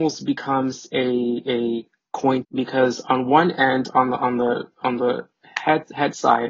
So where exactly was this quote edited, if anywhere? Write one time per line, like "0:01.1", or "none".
0:02.4